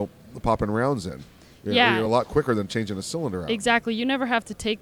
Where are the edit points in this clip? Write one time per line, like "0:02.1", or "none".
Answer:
none